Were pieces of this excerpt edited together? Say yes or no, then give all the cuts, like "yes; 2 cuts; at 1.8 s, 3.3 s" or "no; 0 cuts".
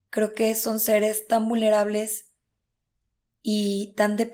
no; 0 cuts